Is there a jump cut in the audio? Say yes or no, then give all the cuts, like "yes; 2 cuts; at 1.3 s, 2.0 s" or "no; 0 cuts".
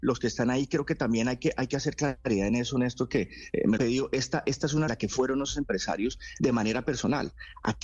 yes; 2 cuts; at 3.8 s, 4.9 s